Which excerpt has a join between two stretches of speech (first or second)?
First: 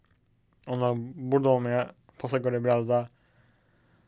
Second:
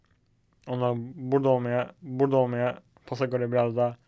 second